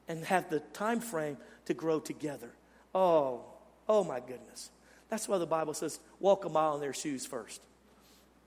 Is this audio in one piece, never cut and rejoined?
yes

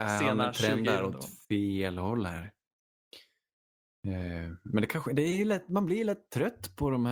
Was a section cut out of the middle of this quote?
yes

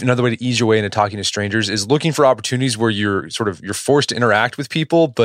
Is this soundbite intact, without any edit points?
yes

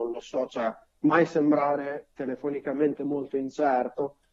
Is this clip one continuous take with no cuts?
no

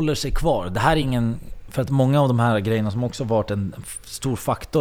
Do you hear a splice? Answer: no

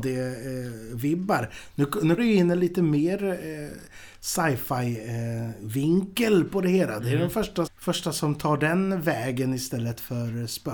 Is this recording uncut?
no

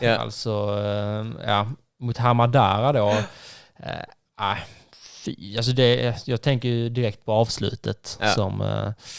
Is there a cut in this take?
no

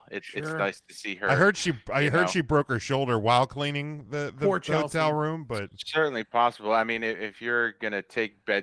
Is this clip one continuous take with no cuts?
yes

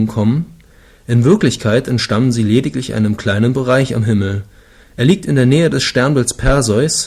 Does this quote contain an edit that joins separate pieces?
no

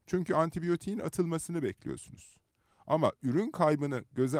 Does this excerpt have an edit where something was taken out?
no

